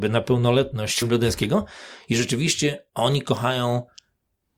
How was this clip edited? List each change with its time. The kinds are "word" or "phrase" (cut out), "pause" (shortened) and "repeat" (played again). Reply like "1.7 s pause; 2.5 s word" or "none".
1.0 s word; 2.9 s pause